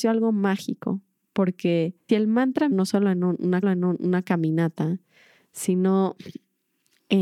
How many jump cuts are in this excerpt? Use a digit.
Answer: 3